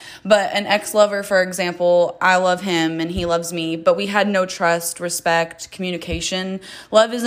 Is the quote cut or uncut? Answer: uncut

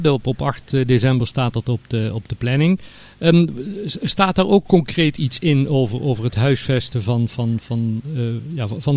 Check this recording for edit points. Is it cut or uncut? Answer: uncut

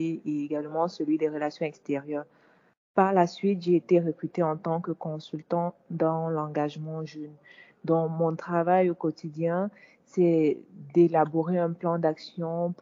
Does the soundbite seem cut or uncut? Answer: uncut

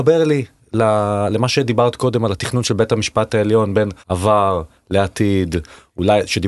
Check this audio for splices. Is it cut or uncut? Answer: cut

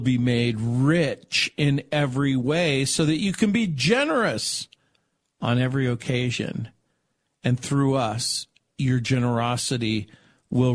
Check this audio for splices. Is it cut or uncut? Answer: uncut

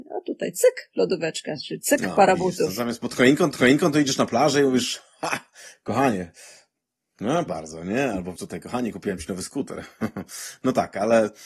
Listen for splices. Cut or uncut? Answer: cut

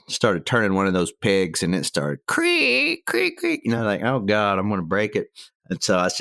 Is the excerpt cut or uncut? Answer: uncut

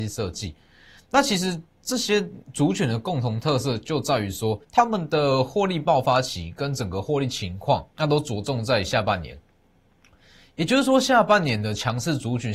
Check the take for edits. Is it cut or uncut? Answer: cut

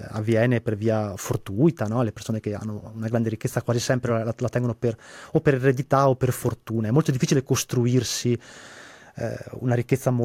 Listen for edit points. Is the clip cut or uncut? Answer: uncut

